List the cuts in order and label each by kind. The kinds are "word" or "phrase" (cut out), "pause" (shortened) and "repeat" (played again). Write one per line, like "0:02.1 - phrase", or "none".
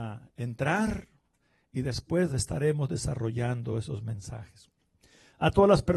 none